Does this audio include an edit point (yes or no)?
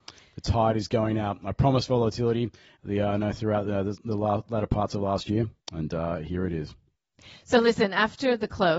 no